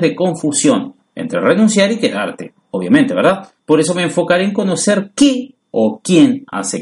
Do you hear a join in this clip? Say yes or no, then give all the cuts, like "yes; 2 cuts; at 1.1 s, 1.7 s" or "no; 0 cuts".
yes; 2 cuts; at 3.6 s, 5.6 s